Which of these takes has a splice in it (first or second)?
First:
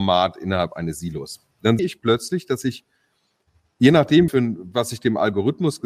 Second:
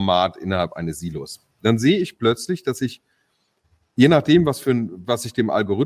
first